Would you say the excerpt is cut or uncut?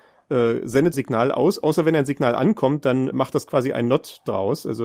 cut